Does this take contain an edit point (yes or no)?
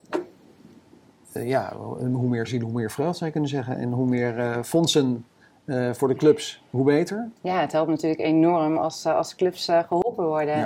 yes